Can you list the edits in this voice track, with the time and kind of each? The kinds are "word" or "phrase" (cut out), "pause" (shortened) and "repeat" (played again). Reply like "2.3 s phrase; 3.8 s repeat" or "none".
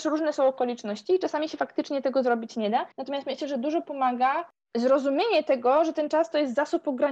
2.9 s pause